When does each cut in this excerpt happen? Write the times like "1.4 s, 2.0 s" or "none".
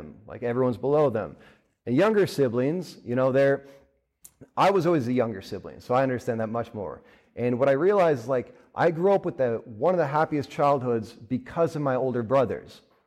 none